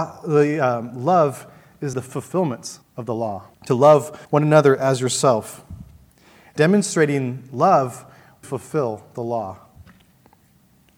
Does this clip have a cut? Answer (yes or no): yes